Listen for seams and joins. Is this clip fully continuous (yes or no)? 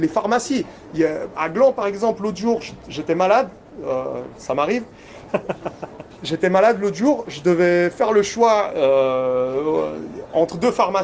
yes